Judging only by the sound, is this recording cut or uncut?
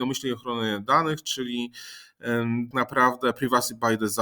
cut